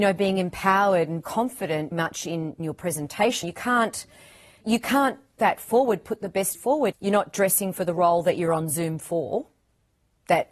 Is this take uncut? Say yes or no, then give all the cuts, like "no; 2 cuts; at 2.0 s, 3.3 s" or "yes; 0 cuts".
no; 8 cuts; at 1.2 s, 1.9 s, 2.6 s, 3.4 s, 4.6 s, 5.4 s, 6.5 s, 6.9 s